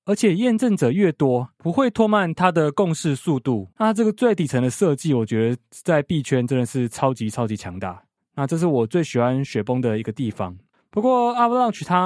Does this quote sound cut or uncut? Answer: uncut